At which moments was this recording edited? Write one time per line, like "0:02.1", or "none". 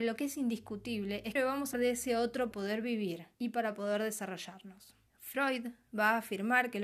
0:01.4
0:01.7
0:02.5
0:03.3
0:05.1